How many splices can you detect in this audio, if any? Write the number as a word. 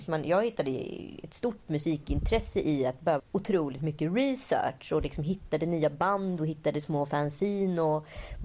one